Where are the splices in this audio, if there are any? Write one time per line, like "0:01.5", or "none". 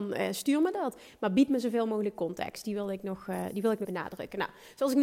0:03.8